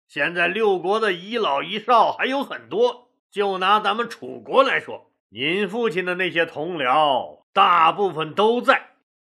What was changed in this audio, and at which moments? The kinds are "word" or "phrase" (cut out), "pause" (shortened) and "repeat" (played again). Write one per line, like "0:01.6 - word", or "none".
0:03.2 - pause
0:05.2 - pause